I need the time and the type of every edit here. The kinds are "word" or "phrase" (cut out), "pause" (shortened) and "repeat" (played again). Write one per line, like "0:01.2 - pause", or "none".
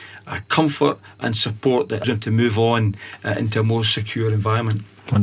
0:02.0 - word

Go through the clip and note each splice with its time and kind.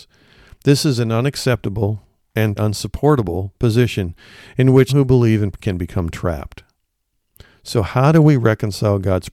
0:02.6 - word
0:04.9 - word
0:05.5 - word

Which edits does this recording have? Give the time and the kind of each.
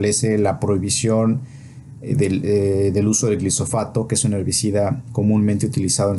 none

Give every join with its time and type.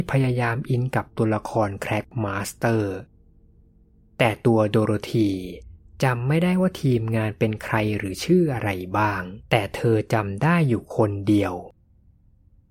0:09.5 - pause

